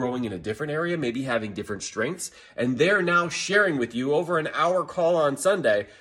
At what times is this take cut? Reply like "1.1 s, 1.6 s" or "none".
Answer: none